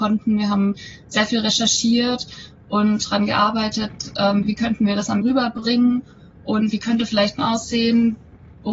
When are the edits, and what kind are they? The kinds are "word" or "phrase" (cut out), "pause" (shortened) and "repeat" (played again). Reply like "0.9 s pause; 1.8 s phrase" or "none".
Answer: 4.4 s word; 5.2 s word; 7.4 s word